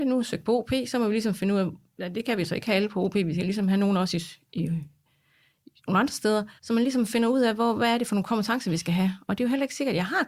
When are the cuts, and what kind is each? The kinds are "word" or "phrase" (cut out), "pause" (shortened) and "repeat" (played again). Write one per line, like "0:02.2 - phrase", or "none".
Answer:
0:05.8 - pause
0:06.6 - pause